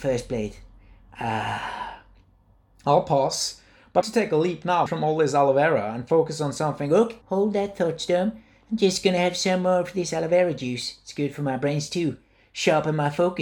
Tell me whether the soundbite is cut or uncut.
cut